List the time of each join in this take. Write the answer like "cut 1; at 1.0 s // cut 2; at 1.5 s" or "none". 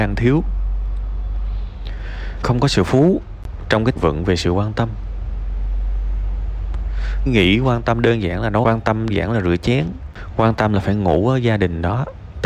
cut 1; at 2.4 s // cut 2; at 2.9 s // cut 3; at 4.0 s // cut 4; at 7.3 s // cut 5; at 8.6 s // cut 6; at 9.1 s